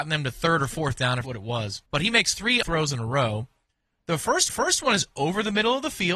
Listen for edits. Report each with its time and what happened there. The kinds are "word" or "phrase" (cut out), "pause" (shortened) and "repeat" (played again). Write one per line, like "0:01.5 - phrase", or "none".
0:01.2 - word
0:01.9 - pause
0:02.6 - word
0:04.5 - repeat

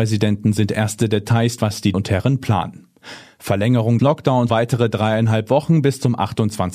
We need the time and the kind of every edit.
0:01.6 - word
0:01.9 - word
0:04.0 - word
0:04.5 - word

